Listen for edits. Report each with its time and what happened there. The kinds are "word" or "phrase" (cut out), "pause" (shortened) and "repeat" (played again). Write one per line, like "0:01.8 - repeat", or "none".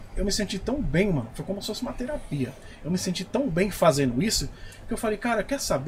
none

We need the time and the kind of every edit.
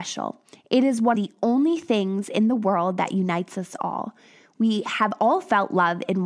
0:01.1 - word

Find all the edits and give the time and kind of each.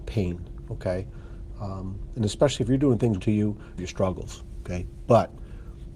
0:03.2 - phrase
0:03.8 - phrase

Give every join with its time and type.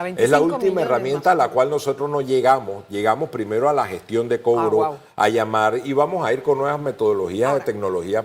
none

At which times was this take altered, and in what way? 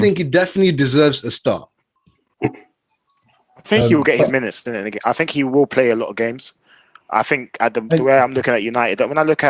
none

